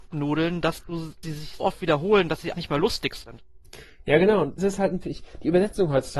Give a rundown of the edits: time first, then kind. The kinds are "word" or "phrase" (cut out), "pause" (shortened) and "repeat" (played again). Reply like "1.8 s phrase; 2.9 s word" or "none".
1.2 s word; 1.6 s word; 2.5 s word; 4.6 s word; 5.0 s word